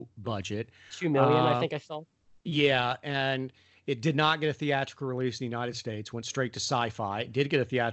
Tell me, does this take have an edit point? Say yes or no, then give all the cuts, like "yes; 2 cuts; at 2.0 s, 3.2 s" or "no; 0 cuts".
no; 0 cuts